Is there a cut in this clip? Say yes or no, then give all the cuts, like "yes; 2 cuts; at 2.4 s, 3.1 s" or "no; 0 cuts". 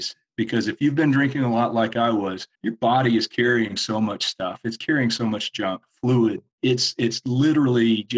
yes; 2 cuts; at 2.5 s, 6.5 s